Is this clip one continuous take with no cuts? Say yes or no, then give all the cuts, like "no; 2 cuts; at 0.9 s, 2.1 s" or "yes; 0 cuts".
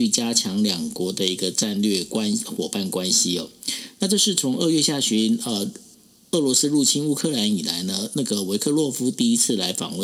yes; 0 cuts